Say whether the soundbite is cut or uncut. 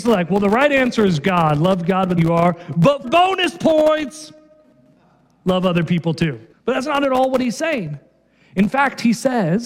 cut